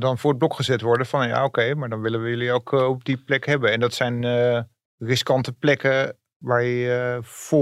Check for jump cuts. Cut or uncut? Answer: uncut